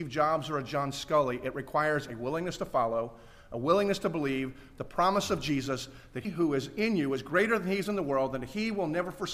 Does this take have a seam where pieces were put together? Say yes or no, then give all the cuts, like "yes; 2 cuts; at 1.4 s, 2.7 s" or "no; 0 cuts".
yes; 1 cut; at 6.2 s